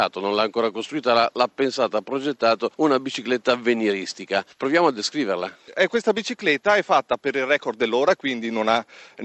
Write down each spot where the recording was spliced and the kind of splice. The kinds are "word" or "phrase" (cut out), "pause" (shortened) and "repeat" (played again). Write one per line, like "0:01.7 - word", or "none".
0:02.7 - pause